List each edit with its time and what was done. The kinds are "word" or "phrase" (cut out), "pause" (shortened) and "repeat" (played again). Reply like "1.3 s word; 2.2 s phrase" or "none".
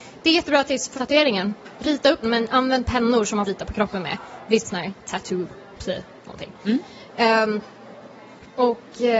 0.9 s word; 2.2 s word; 3.4 s word; 4.6 s word; 5.7 s word

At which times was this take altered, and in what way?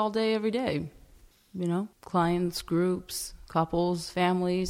1.3 s pause; 1.9 s pause

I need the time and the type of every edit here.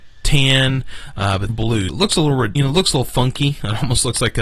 1.5 s phrase; 1.9 s word; 2.6 s word

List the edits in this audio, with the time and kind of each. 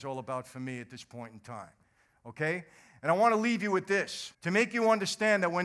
4.3 s pause

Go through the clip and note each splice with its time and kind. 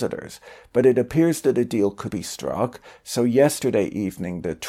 2.1 s word

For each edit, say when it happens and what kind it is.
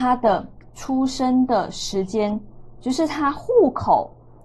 2.8 s word

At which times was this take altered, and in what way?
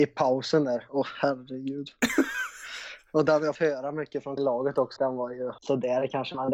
3.6 s word; 4.4 s word; 5.0 s word; 5.6 s pause

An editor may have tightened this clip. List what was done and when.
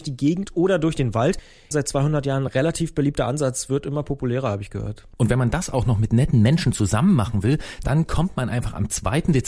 none

